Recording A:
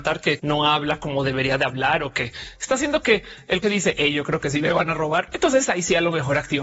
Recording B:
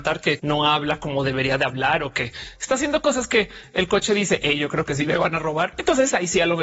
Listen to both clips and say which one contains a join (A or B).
A